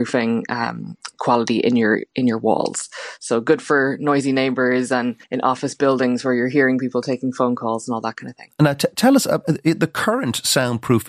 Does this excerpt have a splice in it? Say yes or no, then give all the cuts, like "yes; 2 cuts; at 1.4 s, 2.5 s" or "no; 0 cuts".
yes; 1 cut; at 5.2 s